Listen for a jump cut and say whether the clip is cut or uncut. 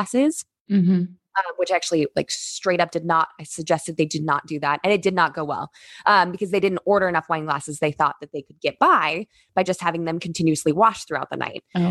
uncut